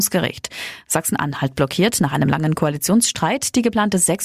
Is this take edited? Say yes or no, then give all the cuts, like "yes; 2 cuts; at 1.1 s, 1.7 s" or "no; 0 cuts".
no; 0 cuts